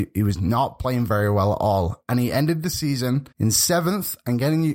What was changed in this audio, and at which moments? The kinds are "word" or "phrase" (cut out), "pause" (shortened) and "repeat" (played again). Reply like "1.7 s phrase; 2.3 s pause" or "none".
3.3 s pause